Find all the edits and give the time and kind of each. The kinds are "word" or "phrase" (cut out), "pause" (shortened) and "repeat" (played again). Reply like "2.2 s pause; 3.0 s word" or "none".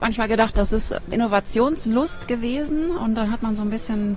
1.1 s word

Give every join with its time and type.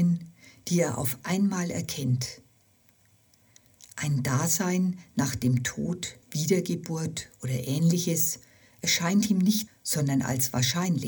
6.2 s pause; 9.7 s phrase

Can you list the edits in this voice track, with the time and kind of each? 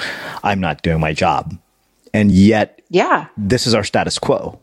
none

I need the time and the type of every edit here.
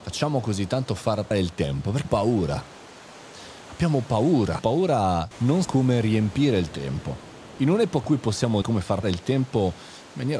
1.3 s word; 2.0 s word; 4.6 s word; 5.3 s word; 5.6 s word; 8.0 s word; 8.6 s word; 9.0 s word

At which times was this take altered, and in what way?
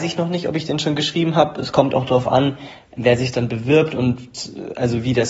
none

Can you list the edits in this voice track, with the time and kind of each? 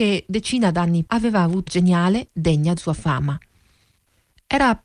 1.1 s word; 1.7 s word; 2.8 s word

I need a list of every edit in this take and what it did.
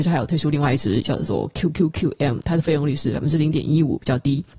1.0 s word

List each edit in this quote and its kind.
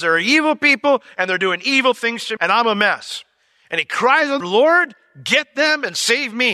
2.4 s word; 4.4 s word

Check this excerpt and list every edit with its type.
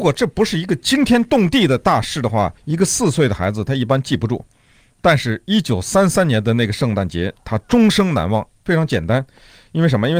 2.6 s pause

